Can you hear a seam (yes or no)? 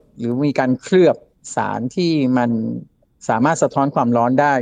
no